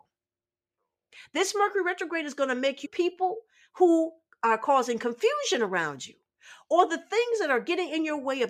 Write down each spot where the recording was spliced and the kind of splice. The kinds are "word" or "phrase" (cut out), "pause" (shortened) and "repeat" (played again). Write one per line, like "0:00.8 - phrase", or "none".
0:02.8 - phrase